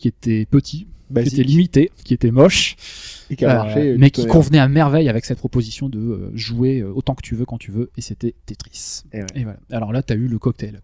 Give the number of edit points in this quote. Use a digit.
1